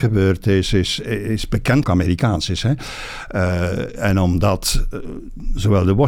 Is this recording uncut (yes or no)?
no